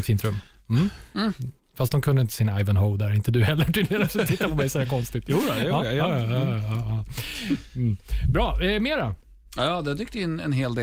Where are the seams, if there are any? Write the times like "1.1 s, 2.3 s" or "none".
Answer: none